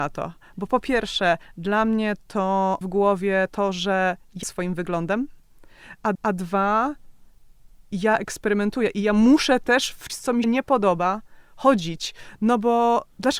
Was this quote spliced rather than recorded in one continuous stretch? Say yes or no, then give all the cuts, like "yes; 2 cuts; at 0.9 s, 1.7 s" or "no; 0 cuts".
yes; 5 cuts; at 2.8 s, 4.4 s, 6.1 s, 10.1 s, 10.4 s